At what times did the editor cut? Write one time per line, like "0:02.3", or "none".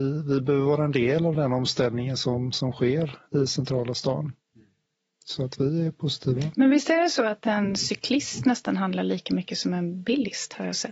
none